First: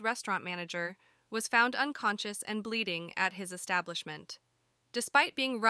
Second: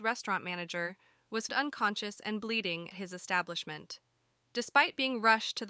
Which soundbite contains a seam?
second; 2 cuts; at 1.5 s, 2.9 s

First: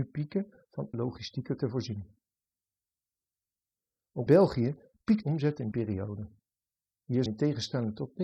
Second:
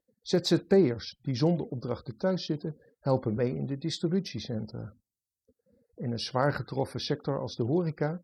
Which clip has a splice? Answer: first; 6 cuts; at 0.9 s, 1.6 s, 4.3 s, 5.2 s, 5.7 s, 7.3 s

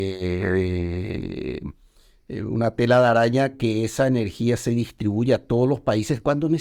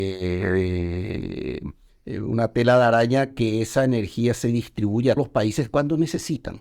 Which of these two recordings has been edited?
second; 2 cuts; at 1.9 s, 5.2 s

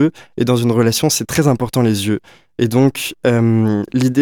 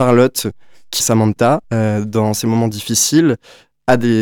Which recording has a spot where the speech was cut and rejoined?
second; 2 cuts; at 1.0 s, 1.6 s

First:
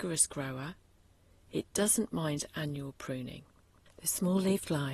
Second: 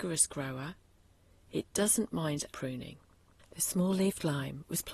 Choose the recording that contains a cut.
second; 1 cut; at 2.5 s

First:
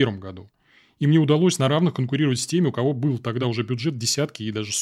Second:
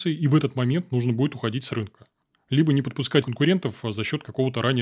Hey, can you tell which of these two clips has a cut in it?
second; 1 cut; at 3.2 s

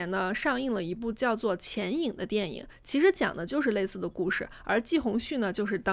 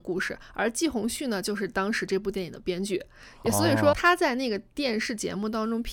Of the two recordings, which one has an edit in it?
second; 1 cut; at 3.9 s

